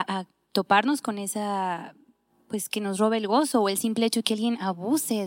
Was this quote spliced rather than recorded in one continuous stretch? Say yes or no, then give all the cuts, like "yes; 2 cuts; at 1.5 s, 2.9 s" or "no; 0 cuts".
no; 0 cuts